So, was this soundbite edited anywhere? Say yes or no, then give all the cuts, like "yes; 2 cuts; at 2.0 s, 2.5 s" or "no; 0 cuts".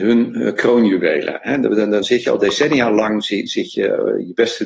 yes; 1 cut; at 2.0 s